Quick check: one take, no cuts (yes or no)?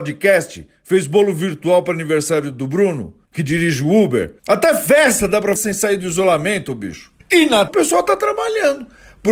no